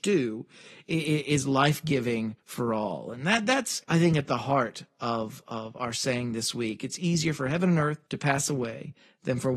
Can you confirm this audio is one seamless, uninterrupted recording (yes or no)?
no